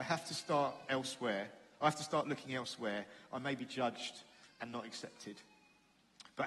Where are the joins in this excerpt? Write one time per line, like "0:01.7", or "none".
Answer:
none